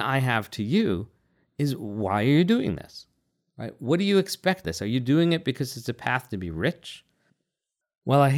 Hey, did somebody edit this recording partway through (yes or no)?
yes